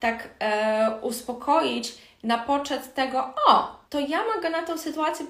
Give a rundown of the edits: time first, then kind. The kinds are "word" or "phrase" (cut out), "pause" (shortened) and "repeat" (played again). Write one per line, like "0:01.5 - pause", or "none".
0:03.8 - pause